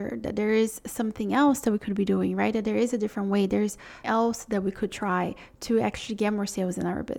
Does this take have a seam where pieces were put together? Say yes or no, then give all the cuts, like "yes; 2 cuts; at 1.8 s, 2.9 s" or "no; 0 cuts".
yes; 1 cut; at 4.0 s